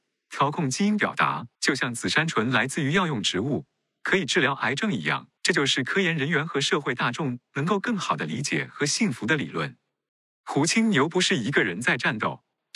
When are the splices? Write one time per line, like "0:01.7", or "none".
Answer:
0:01.5
0:05.4